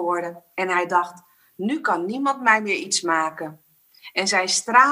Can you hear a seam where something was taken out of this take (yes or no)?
no